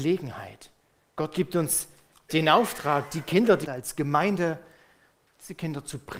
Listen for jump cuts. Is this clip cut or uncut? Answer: cut